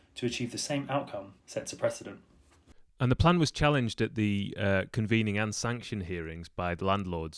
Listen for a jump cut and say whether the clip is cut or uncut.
cut